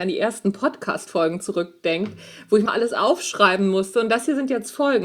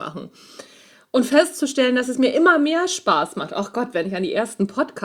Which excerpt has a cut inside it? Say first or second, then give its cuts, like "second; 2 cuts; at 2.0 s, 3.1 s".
first; 1 cut; at 2.7 s